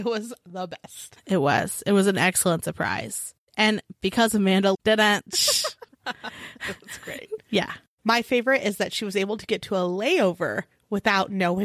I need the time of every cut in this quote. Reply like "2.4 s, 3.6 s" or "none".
4.7 s, 5.9 s